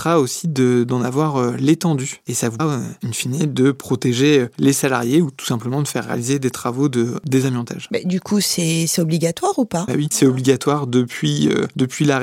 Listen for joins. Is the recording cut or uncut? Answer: cut